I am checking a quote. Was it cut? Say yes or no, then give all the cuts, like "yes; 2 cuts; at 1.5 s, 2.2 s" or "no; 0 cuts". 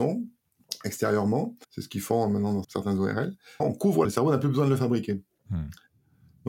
yes; 5 cuts; at 1.6 s, 2.6 s, 3.6 s, 4.0 s, 5.4 s